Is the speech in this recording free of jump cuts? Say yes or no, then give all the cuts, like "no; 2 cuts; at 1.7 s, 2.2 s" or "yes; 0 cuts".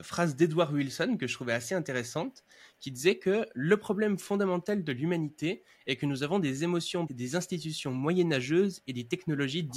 no; 1 cut; at 7.1 s